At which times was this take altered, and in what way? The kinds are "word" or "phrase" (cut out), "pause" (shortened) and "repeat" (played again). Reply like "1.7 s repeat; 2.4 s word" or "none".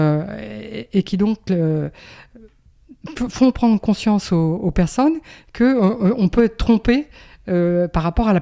none